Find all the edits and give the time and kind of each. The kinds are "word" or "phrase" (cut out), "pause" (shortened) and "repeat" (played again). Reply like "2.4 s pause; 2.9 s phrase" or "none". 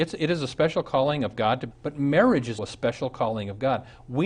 1.7 s word; 2.6 s word

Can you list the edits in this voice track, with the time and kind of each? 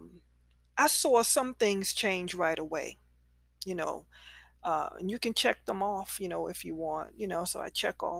none

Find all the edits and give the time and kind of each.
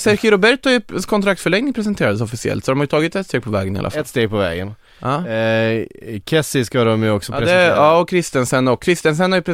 none

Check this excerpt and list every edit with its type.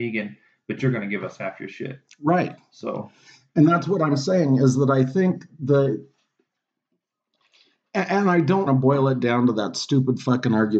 8.7 s word

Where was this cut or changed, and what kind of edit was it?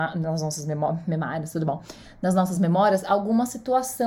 none

